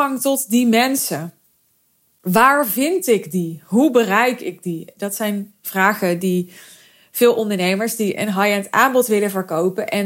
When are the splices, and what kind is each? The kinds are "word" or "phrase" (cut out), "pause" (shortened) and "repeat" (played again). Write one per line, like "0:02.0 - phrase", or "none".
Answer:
none